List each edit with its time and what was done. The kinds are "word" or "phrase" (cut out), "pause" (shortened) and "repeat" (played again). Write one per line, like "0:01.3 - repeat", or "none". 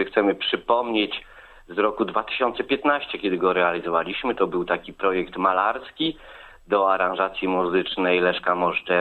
none